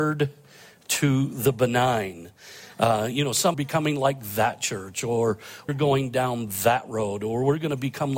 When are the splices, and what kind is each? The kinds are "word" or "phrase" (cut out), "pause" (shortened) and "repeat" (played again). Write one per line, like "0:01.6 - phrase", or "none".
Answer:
0:03.5 - phrase
0:05.7 - word